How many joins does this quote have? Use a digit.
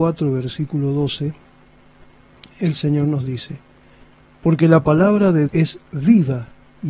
1